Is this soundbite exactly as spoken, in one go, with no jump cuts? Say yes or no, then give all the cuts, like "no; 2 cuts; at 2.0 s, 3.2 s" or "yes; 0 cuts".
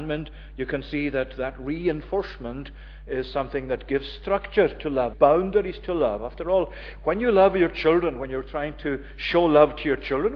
no; 1 cut; at 5.1 s